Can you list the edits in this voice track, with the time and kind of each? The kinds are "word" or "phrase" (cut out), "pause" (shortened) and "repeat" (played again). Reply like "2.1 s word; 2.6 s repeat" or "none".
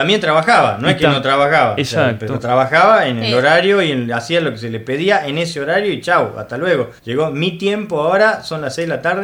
7.0 s pause